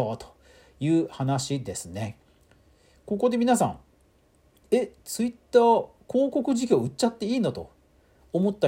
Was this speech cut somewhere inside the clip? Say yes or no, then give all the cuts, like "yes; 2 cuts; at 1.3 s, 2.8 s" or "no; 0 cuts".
no; 0 cuts